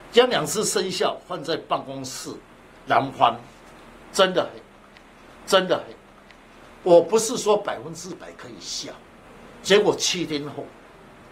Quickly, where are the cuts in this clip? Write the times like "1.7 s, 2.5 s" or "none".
5.4 s